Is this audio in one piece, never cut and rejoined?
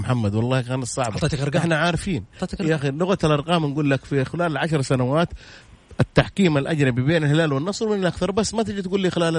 yes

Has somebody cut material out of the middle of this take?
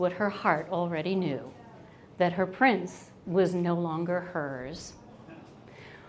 no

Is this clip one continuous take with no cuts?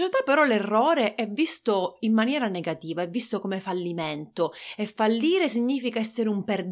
yes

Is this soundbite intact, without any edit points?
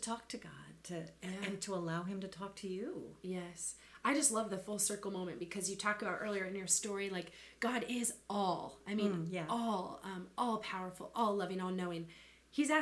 yes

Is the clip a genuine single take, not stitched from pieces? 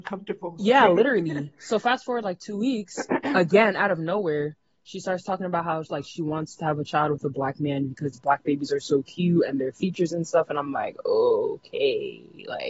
yes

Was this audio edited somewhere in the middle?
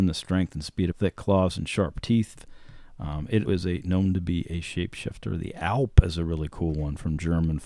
yes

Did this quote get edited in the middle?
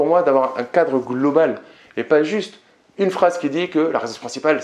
no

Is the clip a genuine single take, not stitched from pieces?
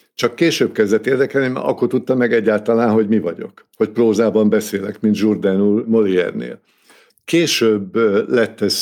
yes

